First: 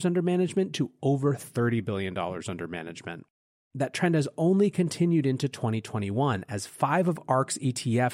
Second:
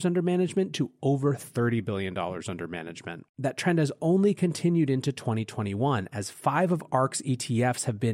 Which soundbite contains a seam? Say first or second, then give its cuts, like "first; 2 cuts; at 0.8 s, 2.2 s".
second; 1 cut; at 3.3 s